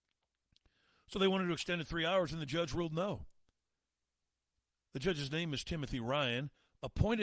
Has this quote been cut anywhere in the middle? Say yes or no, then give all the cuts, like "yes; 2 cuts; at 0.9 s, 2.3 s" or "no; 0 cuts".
no; 0 cuts